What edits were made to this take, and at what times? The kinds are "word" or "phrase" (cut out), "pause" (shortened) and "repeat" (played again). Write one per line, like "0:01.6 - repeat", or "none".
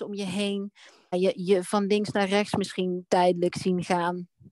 0:01.1 - phrase